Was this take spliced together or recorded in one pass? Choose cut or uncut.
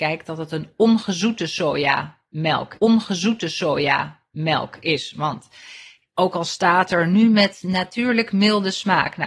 cut